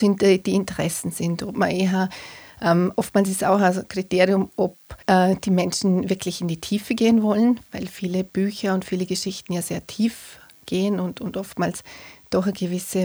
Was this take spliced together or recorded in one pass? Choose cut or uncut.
cut